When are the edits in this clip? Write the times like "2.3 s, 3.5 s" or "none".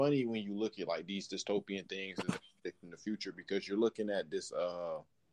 none